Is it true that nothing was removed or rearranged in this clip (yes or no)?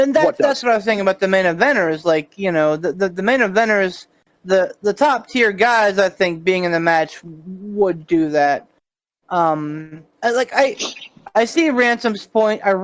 yes